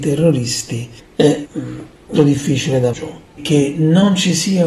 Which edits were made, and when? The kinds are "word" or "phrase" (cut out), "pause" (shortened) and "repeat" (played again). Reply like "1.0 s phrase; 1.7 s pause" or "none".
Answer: 1.4 s word; 2.2 s word; 2.9 s word; 3.4 s word